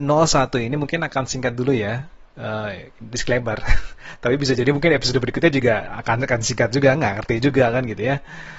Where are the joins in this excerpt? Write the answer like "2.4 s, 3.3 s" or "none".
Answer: none